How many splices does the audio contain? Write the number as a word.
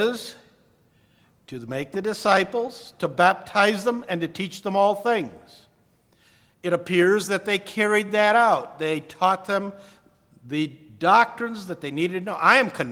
zero